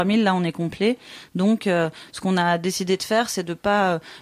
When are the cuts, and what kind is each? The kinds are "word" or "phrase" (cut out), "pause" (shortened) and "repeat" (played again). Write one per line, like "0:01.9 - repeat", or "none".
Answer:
none